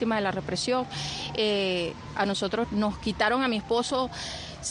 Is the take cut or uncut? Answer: cut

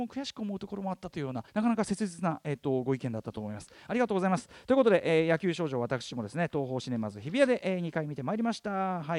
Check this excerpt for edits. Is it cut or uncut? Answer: cut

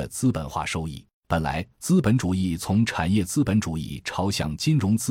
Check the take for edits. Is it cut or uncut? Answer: cut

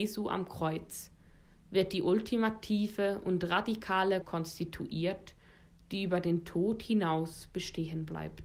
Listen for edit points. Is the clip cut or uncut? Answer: cut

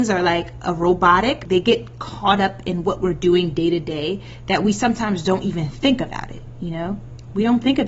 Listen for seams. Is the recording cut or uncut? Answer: uncut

